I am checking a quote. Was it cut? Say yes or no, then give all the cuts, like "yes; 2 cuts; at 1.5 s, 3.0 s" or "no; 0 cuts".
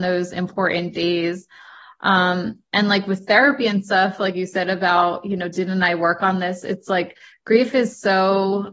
no; 0 cuts